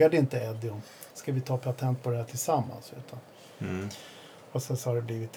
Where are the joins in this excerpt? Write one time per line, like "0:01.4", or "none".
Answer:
0:01.1

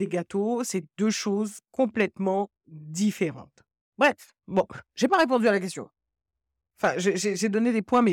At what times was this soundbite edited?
none

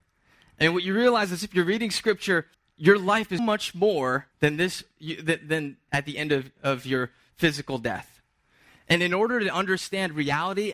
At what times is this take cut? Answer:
0:02.5
0:03.4
0:04.3
0:05.9

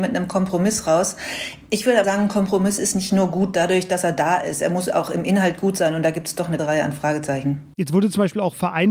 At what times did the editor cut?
0:02.0
0:06.6

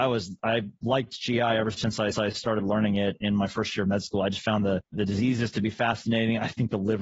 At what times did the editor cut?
0:02.1
0:04.9

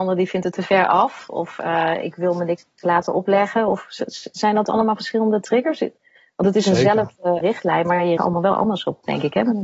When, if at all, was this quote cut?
0:07.4
0:08.2

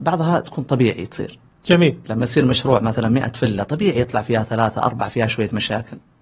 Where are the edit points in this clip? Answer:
0:01.5

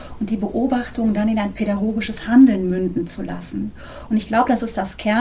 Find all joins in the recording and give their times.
none

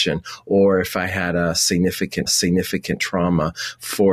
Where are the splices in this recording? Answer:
0:02.3

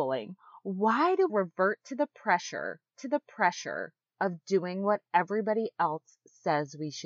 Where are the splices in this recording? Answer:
0:01.3
0:02.9

